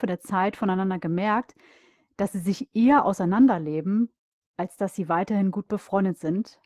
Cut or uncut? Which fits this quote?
uncut